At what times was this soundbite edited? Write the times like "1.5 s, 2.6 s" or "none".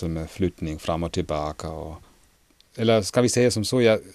none